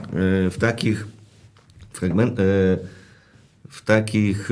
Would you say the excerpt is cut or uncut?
uncut